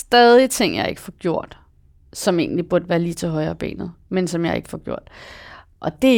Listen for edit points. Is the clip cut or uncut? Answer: uncut